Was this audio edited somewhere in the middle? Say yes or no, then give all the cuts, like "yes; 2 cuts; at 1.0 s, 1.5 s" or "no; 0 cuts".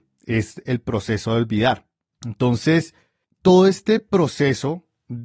no; 0 cuts